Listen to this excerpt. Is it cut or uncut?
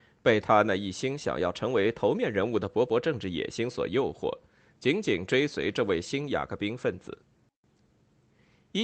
uncut